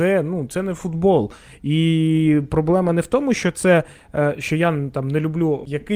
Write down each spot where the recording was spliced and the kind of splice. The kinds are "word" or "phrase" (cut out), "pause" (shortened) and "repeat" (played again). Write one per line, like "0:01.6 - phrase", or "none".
none